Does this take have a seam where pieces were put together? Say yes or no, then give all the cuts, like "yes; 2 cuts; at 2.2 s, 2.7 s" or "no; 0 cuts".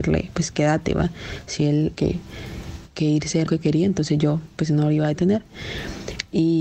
yes; 2 cuts; at 1.9 s, 3.5 s